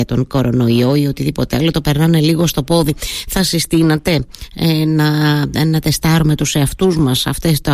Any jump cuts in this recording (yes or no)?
no